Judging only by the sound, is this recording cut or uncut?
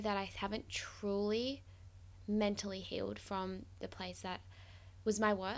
uncut